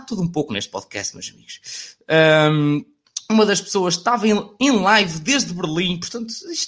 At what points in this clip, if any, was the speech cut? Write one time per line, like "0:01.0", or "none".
none